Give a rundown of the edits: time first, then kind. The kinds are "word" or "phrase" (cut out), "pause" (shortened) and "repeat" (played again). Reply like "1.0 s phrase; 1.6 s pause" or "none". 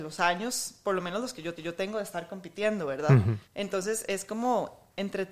1.6 s repeat; 3.4 s pause